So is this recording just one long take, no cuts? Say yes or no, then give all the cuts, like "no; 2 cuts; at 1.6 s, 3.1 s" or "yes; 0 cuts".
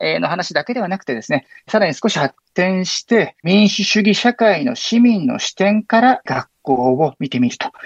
no; 1 cut; at 3.4 s